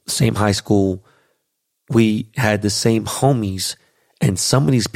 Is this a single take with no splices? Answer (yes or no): yes